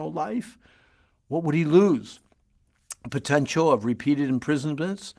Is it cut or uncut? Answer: uncut